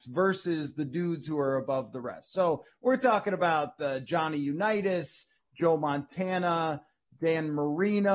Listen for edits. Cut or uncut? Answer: uncut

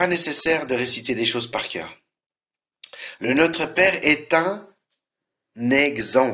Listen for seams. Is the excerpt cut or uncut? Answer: uncut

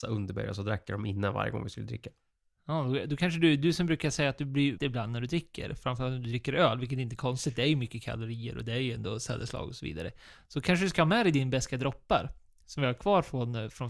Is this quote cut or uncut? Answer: cut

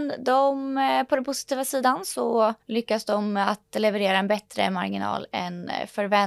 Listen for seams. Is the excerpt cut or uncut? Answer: cut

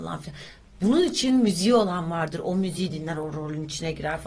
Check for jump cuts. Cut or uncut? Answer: uncut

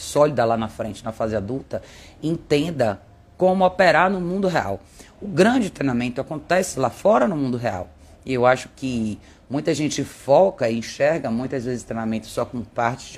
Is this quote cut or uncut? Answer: uncut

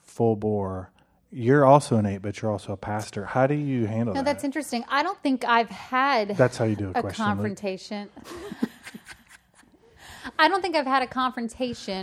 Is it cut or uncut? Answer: uncut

